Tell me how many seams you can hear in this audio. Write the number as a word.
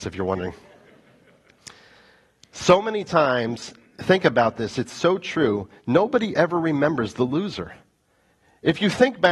zero